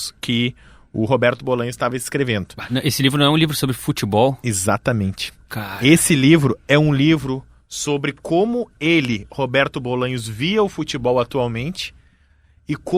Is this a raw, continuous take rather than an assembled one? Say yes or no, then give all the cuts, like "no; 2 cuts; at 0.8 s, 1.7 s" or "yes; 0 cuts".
yes; 0 cuts